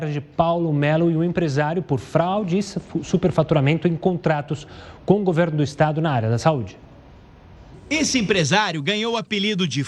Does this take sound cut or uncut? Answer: uncut